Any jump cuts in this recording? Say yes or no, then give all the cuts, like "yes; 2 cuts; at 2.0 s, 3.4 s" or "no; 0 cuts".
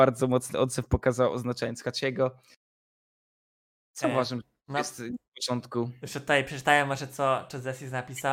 no; 0 cuts